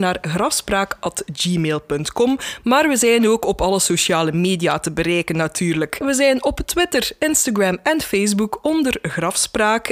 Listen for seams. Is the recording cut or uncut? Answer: uncut